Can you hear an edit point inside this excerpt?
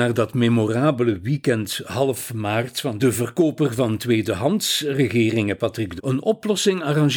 yes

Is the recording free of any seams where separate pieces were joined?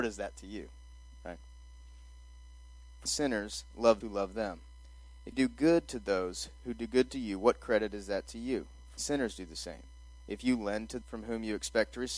no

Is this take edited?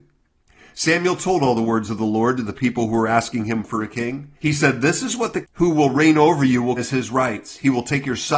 yes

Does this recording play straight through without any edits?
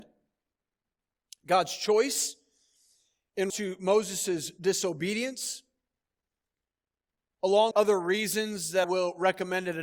no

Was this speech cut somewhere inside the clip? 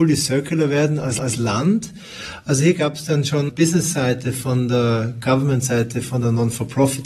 yes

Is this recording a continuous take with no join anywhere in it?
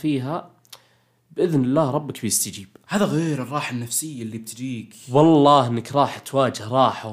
yes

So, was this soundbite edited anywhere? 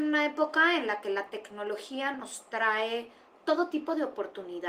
no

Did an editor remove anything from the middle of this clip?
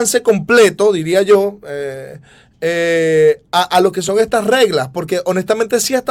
no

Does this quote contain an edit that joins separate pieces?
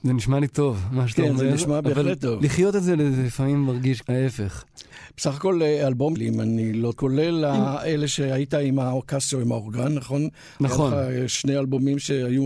yes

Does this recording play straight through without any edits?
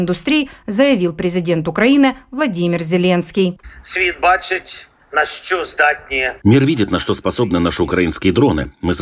no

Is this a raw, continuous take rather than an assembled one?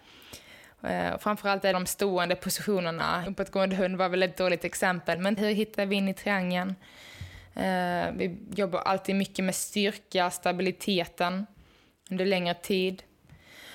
no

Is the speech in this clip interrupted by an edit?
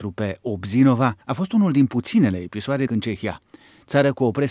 yes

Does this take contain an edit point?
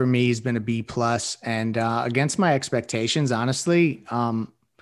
no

